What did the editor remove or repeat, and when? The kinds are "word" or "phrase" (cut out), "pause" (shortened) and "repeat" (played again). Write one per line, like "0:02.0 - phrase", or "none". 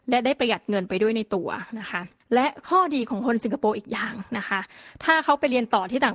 0:04.3 - pause